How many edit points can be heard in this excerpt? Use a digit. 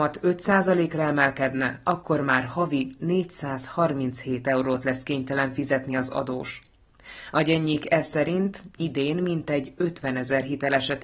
0